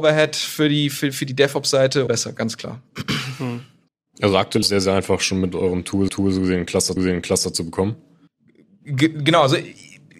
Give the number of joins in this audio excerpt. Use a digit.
6